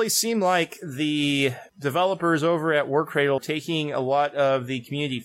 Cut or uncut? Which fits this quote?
cut